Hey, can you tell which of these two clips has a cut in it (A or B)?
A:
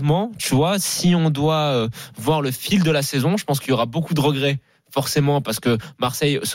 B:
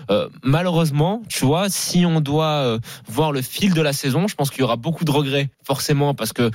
B